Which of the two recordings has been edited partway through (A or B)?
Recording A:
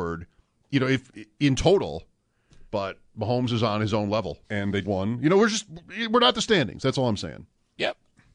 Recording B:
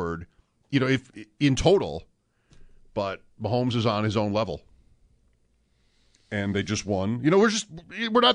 A